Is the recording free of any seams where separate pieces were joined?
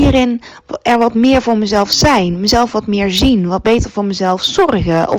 yes; 0 cuts

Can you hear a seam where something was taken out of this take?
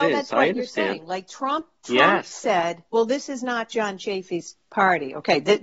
yes; 1 cut; at 2.9 s

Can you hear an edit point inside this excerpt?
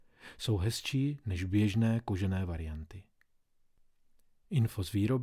no; 0 cuts

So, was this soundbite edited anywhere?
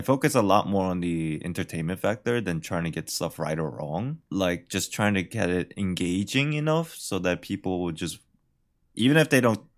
no; 0 cuts

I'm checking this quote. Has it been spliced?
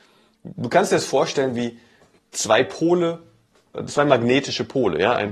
yes; 1 cut; at 2.2 s

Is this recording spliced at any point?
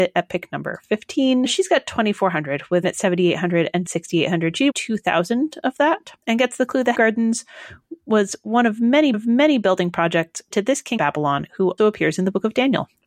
yes; 9 cuts; at 2.8 s, 3.8 s, 4.7 s, 6.2 s, 6.9 s, 9.1 s, 10.5 s, 11.0 s, 11.8 s

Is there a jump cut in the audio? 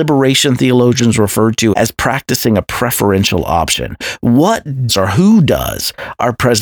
yes; 2 cuts; at 1.7 s, 4.9 s

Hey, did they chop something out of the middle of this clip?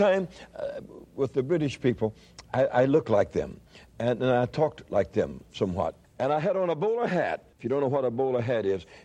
yes; 2 cuts; at 6.0 s, 7.5 s

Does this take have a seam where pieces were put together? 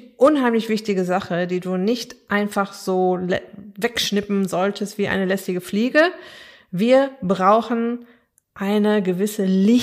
no; 0 cuts

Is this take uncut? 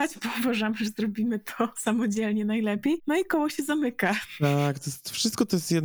yes; 0 cuts

